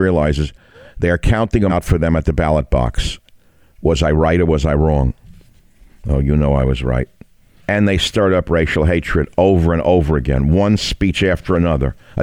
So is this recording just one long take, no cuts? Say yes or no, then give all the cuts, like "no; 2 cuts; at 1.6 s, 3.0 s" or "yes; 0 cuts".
no; 1 cut; at 1.7 s